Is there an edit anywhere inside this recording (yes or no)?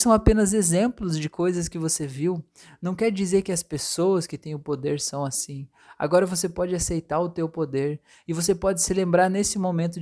no